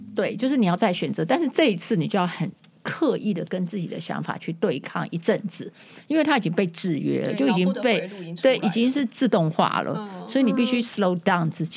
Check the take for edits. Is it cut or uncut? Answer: uncut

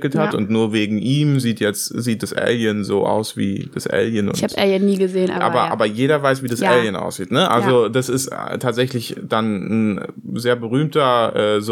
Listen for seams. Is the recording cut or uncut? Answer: uncut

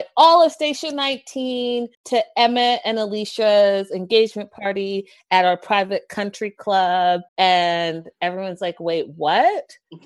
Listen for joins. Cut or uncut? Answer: cut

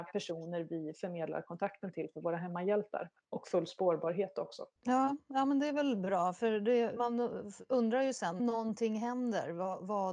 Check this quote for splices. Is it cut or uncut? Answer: cut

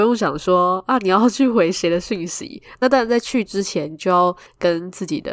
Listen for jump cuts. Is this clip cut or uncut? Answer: uncut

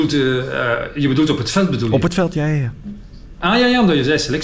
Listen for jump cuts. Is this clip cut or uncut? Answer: uncut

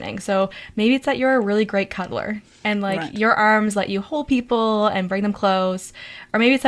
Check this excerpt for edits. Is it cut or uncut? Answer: uncut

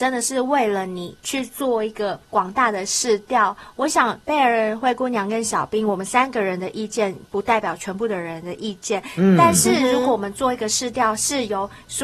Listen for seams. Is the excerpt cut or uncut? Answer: cut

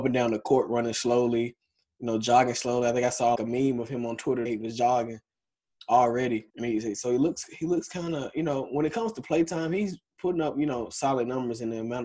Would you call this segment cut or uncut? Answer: cut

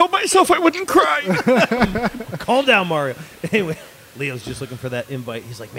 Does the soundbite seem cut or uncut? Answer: uncut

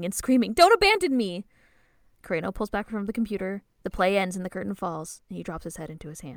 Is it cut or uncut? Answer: uncut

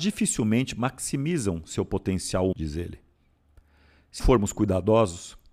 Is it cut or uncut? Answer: cut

